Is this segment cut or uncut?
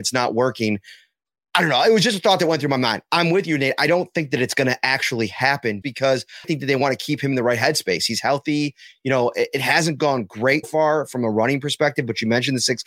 cut